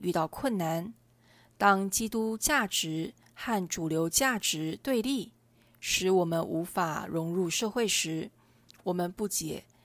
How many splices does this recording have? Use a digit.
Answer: 0